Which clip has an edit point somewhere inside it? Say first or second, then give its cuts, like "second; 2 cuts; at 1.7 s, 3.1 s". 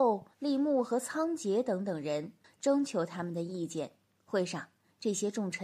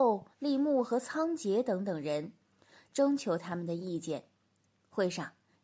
first; 2 cuts; at 2.4 s, 4.0 s